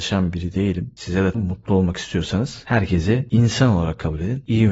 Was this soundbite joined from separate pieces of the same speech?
yes; 1 cut; at 1.3 s

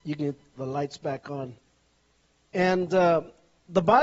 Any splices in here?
no; 0 cuts

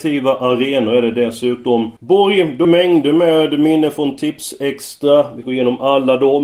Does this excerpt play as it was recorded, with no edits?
no; 3 cuts; at 2.0 s, 2.6 s, 5.4 s

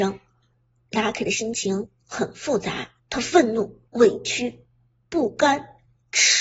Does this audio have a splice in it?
yes; 2 cuts; at 3.0 s, 3.9 s

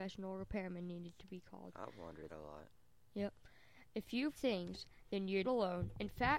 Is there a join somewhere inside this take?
yes; 3 cuts; at 2.3 s, 4.4 s, 5.4 s

